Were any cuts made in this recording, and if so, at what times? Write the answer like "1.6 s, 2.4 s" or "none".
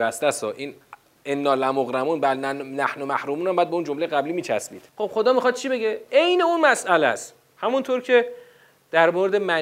4.9 s